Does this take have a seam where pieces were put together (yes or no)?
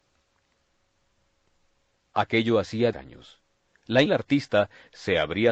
yes